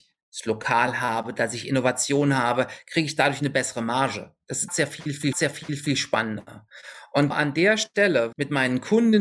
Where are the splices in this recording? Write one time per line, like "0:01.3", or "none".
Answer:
0:04.7
0:05.3
0:07.3
0:08.3